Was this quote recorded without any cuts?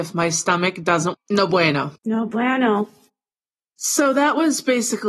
no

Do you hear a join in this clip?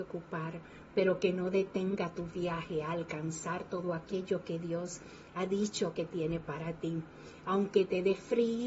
no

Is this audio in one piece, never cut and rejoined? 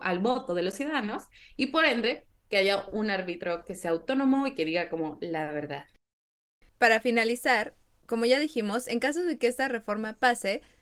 yes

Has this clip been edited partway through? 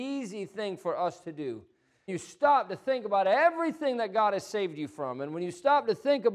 yes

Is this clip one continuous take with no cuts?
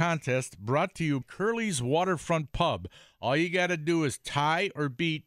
no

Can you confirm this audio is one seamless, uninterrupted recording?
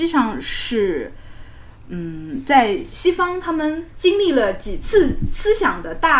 yes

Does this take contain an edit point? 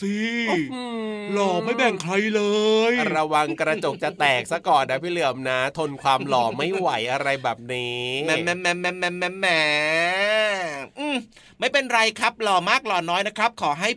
no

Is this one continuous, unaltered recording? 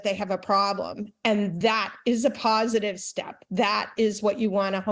yes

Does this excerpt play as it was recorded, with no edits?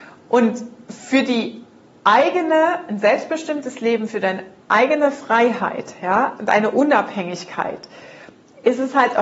yes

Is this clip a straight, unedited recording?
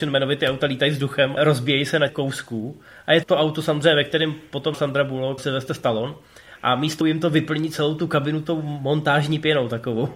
no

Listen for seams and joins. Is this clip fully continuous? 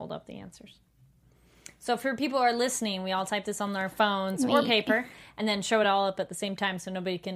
yes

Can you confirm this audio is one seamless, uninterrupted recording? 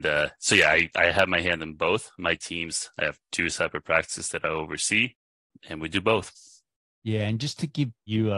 yes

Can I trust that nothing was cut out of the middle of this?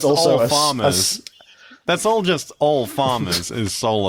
yes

